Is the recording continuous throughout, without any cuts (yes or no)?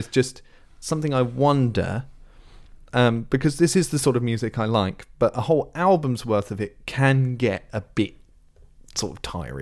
yes